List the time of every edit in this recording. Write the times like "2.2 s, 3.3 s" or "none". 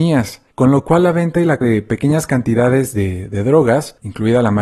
1.6 s